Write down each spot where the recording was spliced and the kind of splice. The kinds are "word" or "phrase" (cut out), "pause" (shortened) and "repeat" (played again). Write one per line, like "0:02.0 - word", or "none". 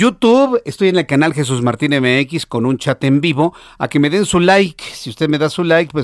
none